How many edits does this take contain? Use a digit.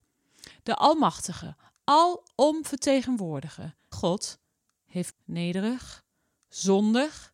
2